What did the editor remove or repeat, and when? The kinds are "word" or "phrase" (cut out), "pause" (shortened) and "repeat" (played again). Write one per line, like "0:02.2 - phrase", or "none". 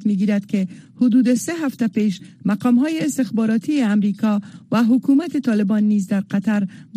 none